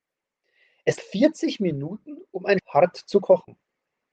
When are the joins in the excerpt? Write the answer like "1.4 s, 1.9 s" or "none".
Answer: 1.0 s, 2.6 s